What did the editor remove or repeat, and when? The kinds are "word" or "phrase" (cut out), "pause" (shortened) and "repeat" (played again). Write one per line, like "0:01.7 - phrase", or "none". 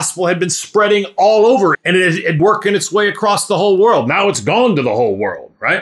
0:01.7 - word
0:02.4 - word